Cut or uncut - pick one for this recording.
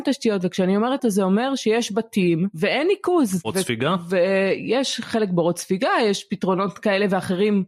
cut